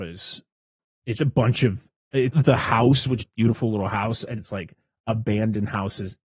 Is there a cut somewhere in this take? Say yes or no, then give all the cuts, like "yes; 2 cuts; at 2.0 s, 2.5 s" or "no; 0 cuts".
yes; 4 cuts; at 1.2 s, 2.3 s, 3.2 s, 4.4 s